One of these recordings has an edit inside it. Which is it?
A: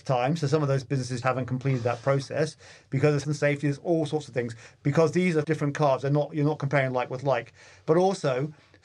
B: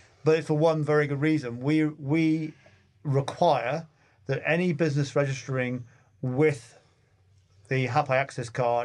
A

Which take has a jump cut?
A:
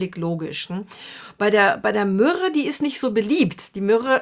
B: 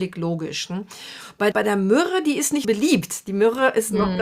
B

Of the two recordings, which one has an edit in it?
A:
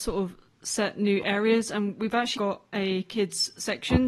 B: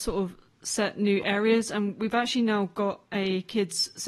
A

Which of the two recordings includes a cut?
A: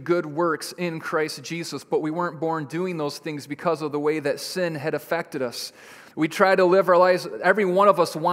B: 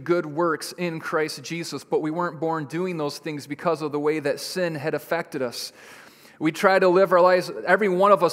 A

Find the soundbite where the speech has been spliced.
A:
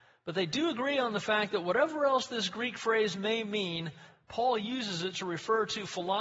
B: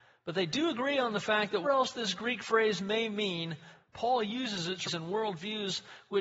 B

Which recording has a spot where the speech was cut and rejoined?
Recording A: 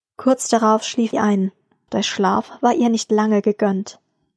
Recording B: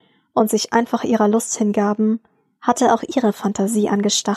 A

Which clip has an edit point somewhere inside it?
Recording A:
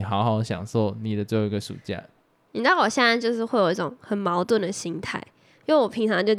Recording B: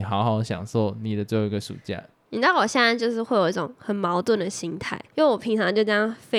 B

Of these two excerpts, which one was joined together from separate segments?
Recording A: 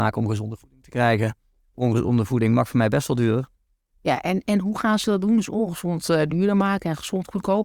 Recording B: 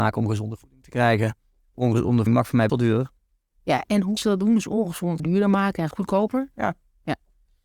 B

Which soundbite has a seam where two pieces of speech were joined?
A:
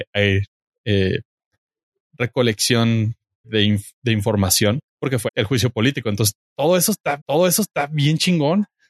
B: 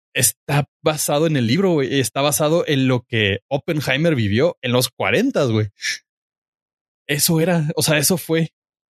A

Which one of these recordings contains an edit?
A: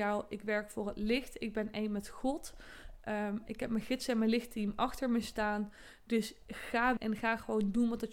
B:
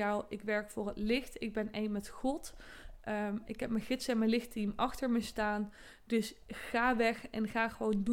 A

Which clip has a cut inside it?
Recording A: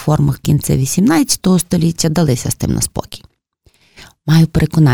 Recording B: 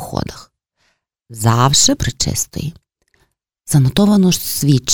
B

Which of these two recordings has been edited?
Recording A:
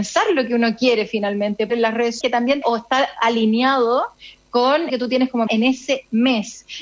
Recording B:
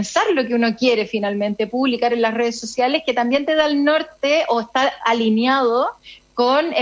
A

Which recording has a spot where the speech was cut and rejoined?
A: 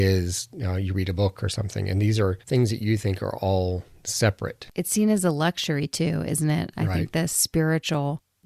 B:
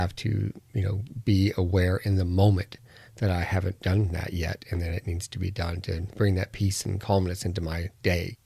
A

